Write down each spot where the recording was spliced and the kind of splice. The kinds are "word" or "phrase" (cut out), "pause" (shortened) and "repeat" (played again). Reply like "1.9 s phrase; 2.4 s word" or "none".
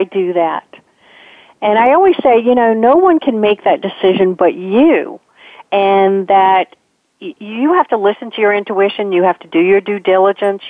none